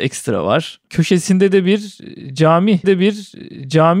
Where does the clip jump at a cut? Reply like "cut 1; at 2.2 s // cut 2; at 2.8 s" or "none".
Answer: cut 1; at 2.8 s